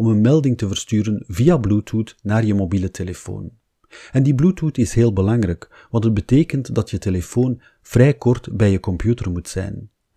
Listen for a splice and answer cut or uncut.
uncut